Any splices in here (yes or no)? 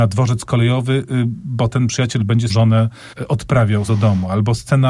yes